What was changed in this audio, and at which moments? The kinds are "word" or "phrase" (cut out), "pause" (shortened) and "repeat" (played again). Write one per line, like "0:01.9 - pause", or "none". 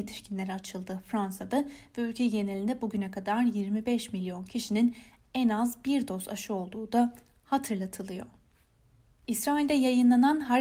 none